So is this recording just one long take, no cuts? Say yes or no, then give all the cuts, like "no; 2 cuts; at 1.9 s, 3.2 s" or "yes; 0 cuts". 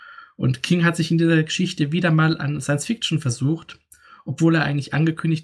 yes; 0 cuts